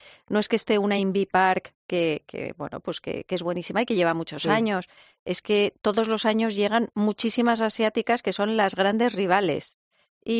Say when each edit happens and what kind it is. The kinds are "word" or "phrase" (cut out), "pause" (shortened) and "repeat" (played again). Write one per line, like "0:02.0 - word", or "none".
none